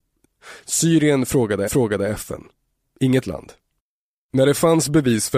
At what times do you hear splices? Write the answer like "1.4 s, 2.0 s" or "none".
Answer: 1.7 s, 3.2 s, 3.8 s